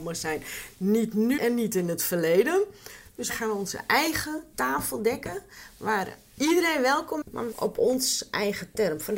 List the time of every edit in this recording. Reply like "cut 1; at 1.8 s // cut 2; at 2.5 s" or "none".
cut 1; at 1.4 s // cut 2; at 3.3 s // cut 3; at 7.2 s // cut 4; at 7.5 s